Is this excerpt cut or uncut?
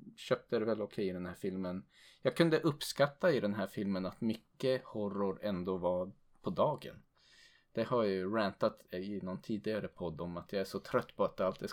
uncut